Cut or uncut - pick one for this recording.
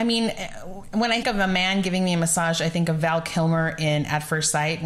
cut